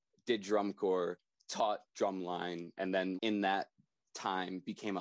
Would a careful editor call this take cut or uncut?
cut